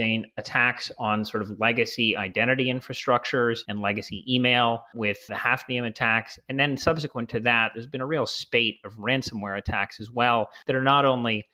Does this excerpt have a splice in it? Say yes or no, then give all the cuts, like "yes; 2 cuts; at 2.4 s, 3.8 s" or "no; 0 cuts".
no; 0 cuts